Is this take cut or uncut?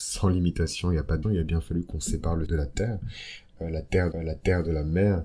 cut